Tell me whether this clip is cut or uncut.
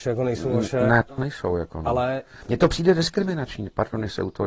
cut